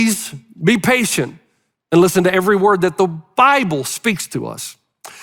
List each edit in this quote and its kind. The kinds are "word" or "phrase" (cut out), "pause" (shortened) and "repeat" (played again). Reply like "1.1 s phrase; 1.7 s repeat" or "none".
none